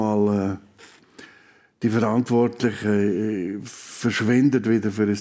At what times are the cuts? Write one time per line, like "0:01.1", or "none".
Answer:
none